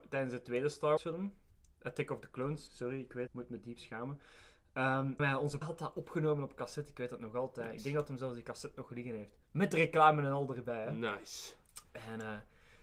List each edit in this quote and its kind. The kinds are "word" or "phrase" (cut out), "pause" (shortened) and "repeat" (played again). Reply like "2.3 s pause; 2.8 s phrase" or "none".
1.0 s word; 2.7 s word; 3.3 s word; 5.2 s word; 5.6 s word